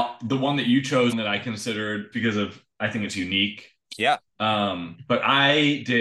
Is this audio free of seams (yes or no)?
no